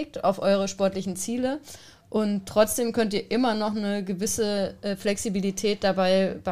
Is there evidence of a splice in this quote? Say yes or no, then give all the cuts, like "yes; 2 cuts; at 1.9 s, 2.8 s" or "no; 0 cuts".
no; 0 cuts